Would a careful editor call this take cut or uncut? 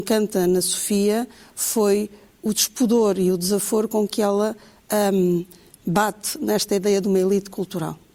uncut